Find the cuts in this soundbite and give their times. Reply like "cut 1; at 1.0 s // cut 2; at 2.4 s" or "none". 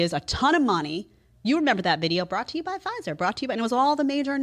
none